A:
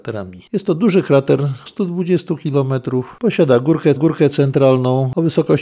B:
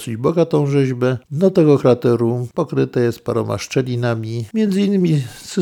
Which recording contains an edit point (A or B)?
A